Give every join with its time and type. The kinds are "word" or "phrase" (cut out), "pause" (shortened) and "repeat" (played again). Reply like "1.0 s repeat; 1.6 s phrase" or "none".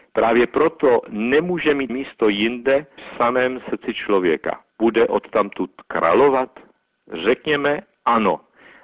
1.9 s phrase; 3.0 s word; 4.7 s pause